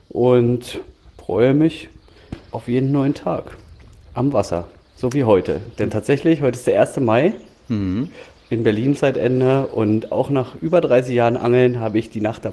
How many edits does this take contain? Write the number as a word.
one